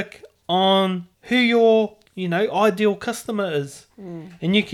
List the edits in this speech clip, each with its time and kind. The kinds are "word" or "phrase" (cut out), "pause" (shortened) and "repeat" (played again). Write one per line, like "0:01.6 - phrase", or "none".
0:01.1 - pause
0:02.1 - pause